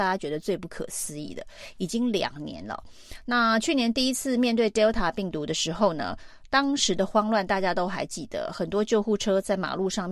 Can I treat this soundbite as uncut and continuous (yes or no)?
yes